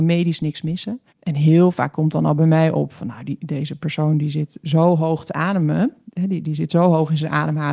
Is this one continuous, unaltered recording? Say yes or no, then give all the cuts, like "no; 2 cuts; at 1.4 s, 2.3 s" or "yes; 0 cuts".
no; 1 cut; at 1.1 s